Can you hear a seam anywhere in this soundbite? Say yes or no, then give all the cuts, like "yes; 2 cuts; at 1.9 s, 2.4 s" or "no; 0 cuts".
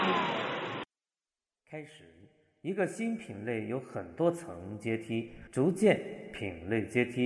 yes; 1 cut; at 5.5 s